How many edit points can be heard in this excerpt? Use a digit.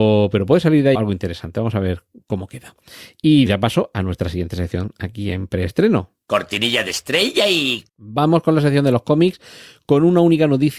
4